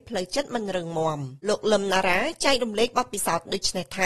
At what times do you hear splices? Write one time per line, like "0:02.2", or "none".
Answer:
0:01.4